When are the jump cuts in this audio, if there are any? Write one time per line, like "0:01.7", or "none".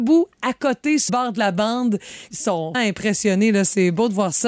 0:01.1
0:02.3
0:02.7